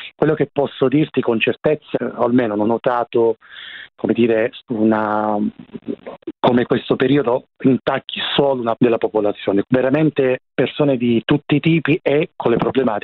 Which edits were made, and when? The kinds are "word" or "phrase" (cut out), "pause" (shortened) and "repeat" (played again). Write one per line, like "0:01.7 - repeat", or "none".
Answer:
0:01.9 - phrase
0:02.6 - word
0:07.5 - pause
0:08.8 - word
0:09.6 - word